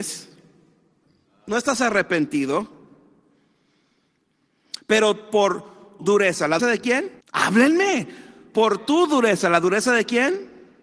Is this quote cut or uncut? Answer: cut